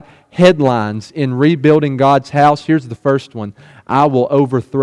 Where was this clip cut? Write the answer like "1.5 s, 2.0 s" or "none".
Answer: none